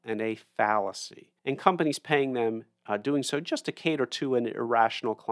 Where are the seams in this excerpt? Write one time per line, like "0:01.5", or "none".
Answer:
0:01.4

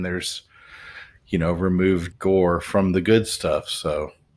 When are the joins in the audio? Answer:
0:02.1

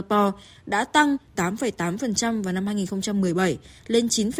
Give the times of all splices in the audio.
0:01.3

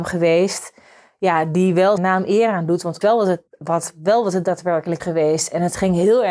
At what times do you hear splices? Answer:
0:02.0
0:03.0
0:03.5
0:05.0

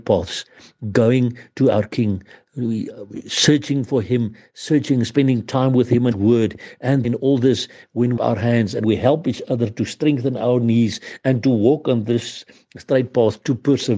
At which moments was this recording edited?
0:06.1
0:07.0
0:08.2
0:08.8

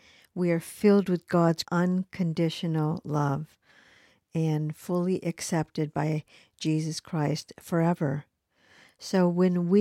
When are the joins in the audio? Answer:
0:01.6

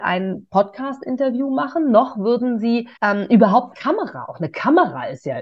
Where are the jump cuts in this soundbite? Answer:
0:03.0
0:03.7

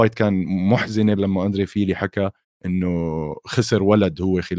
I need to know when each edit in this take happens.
0:01.2
0:02.4

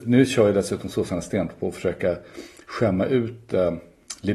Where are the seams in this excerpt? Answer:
none

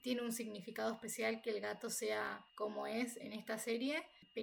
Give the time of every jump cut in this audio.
0:02.5

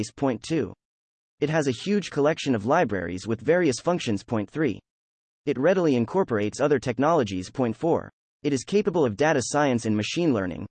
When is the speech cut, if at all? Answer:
none

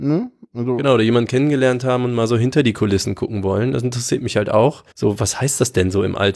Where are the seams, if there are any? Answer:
0:04.9

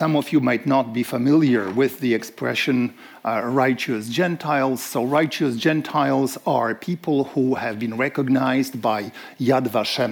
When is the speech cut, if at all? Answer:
none

